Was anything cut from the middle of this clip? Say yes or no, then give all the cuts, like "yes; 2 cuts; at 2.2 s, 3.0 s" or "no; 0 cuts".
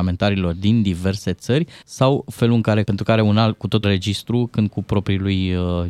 yes; 4 cuts; at 1.8 s, 2.8 s, 3.8 s, 4.7 s